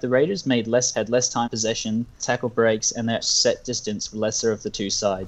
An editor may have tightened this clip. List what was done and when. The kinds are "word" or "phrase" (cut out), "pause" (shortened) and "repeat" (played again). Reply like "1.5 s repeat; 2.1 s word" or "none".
0.9 s word; 1.5 s word; 2.2 s word; 3.2 s word; 4.1 s word